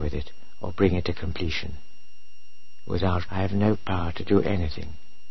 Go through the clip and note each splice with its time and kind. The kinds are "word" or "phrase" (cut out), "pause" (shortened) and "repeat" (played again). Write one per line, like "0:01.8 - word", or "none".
0:03.3 - word